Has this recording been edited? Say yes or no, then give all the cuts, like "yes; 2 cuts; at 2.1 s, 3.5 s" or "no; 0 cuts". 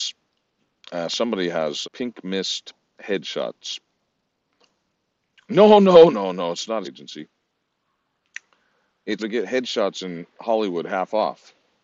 yes; 4 cuts; at 1.8 s, 6.1 s, 6.8 s, 9.2 s